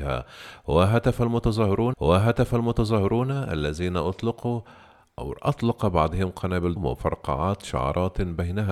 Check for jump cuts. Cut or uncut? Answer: cut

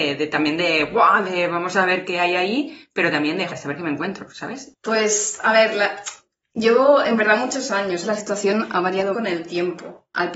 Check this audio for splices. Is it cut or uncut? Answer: cut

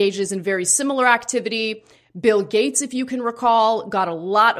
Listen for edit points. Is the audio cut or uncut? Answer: uncut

